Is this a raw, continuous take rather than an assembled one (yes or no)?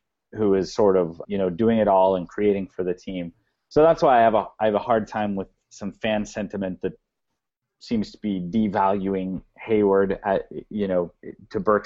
no